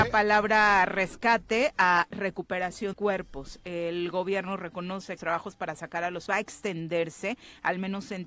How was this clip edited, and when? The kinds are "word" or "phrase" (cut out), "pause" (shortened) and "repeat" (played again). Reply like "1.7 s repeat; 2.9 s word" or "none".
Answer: 2.9 s word; 5.2 s phrase; 6.3 s word